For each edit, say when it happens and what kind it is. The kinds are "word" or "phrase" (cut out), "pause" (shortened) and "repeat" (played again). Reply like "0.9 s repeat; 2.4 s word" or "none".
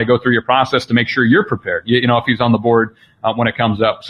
none